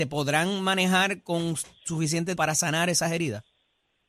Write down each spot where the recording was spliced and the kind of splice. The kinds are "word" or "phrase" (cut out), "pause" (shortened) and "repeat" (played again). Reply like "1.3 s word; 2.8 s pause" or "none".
2.4 s word